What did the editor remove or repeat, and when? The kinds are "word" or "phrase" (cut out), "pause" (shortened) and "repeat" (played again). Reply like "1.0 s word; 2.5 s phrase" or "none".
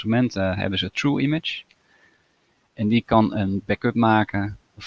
none